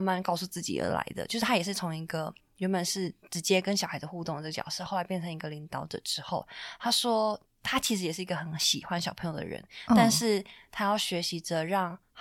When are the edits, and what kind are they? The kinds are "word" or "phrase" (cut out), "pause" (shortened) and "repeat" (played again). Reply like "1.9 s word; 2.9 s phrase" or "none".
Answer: none